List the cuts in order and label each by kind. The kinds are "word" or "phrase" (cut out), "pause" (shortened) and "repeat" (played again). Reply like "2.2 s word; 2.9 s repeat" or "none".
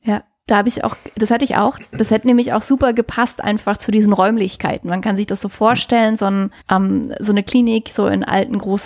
6.6 s pause